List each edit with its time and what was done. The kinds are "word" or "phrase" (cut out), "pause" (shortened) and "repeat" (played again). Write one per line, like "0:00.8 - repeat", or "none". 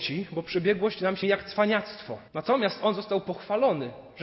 0:01.2 - phrase
0:02.3 - pause